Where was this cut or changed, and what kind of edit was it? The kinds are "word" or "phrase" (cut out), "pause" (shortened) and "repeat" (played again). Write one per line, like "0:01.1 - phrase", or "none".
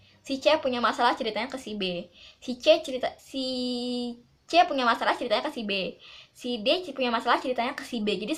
0:03.2 - word